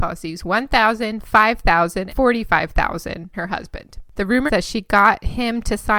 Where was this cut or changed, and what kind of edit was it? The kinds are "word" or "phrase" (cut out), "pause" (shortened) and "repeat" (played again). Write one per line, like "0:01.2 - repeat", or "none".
0:02.1 - word
0:03.3 - word
0:04.5 - word